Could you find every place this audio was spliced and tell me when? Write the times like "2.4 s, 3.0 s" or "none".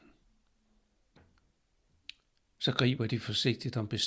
2.3 s